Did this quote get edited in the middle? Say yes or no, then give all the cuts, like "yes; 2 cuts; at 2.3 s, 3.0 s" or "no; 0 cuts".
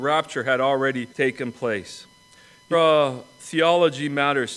yes; 2 cuts; at 1.1 s, 2.7 s